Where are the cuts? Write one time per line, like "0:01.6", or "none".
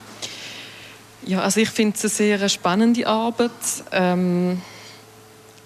none